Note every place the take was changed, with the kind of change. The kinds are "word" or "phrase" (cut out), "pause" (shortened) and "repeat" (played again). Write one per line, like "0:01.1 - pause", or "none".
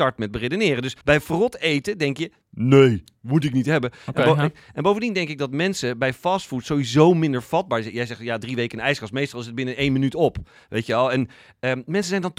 0:01.0 - pause